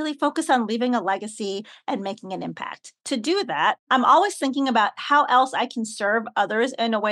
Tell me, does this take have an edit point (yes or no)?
yes